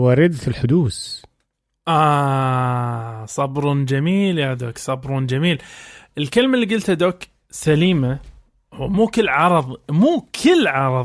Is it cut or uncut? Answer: uncut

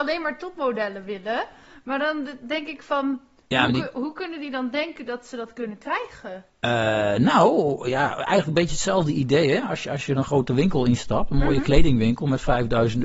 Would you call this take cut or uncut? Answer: uncut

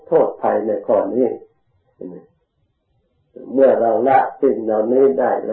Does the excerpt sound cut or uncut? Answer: uncut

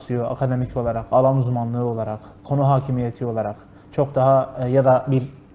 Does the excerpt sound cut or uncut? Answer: uncut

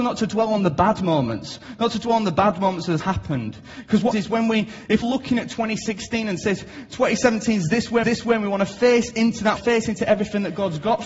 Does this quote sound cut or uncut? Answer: cut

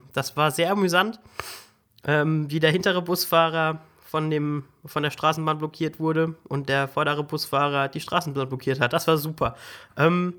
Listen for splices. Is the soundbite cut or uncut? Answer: uncut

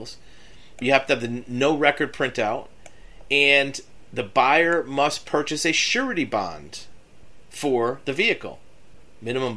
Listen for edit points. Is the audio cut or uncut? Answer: uncut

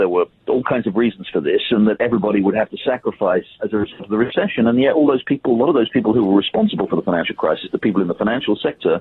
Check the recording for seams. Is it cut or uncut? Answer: cut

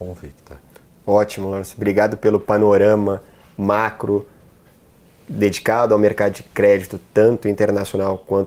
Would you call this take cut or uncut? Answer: uncut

